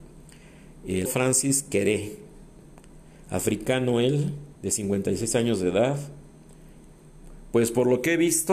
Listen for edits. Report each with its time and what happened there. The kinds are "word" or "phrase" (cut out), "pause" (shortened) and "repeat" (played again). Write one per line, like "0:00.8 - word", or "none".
0:01.1 - word
0:04.6 - pause